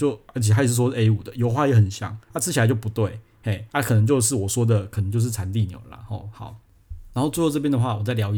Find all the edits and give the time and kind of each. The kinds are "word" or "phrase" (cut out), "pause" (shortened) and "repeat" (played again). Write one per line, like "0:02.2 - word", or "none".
0:02.2 - pause
0:03.7 - pause